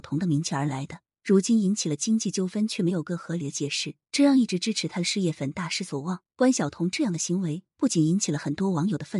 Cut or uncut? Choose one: cut